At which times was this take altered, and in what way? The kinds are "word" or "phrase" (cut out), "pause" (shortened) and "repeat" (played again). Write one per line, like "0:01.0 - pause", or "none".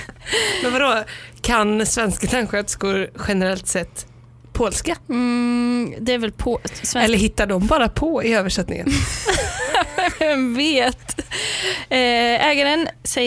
0:05.0 - pause